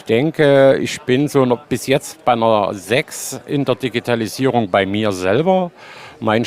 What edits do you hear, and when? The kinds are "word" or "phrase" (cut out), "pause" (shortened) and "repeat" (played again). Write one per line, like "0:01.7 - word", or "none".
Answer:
0:01.6 - pause